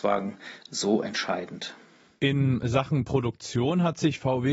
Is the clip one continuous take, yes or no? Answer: yes